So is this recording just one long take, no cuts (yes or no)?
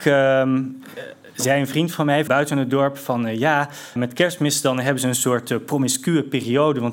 no